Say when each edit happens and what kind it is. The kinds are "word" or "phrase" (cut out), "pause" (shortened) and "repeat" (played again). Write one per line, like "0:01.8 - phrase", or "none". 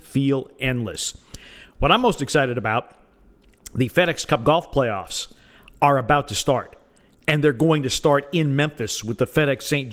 none